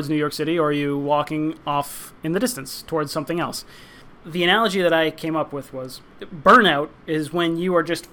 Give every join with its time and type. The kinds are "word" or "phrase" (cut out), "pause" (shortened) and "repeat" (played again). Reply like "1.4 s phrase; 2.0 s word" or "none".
6.1 s pause